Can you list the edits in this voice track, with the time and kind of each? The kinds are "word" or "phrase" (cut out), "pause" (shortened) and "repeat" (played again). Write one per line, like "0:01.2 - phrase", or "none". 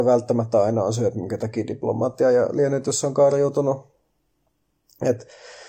none